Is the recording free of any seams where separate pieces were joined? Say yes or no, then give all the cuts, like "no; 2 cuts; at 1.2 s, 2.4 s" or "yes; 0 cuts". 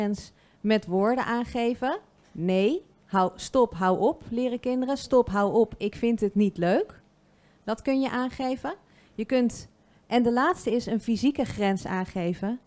yes; 0 cuts